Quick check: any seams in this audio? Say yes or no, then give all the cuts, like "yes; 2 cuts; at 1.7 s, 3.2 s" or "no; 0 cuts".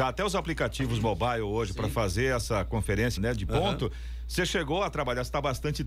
yes; 1 cut; at 3.2 s